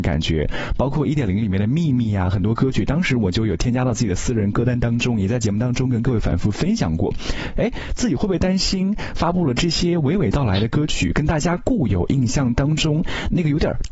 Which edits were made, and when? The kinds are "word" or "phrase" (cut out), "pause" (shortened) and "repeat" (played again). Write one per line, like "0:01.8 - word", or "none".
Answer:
none